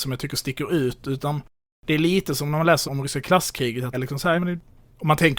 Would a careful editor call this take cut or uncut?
cut